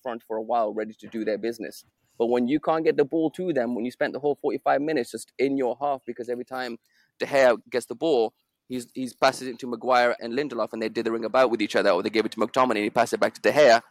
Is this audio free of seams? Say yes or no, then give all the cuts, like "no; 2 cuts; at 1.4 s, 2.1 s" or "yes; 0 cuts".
no; 2 cuts; at 7.6 s, 10.2 s